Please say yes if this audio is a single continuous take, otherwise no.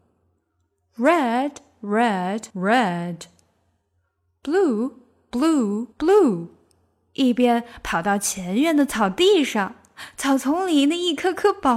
no